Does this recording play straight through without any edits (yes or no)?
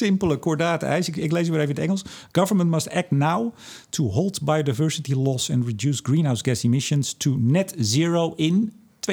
yes